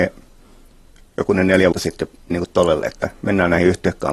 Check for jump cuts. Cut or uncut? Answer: cut